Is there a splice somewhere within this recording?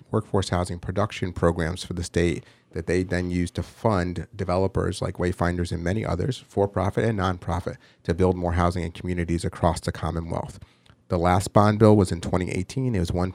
no; 0 cuts

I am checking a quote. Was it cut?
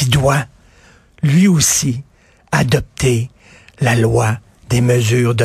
no; 0 cuts

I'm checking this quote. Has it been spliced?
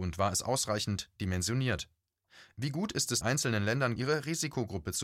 yes; 2 cuts; at 3.2 s, 4.0 s

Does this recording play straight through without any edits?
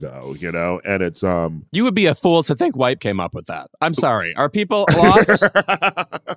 no; 2 cuts; at 1.7 s, 3.0 s

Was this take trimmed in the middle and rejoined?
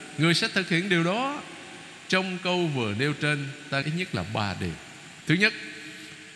yes; 1 cut; at 3.8 s

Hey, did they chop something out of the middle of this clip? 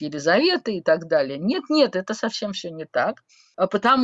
no; 0 cuts

